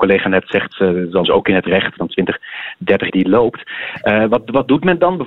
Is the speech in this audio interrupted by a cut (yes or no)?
yes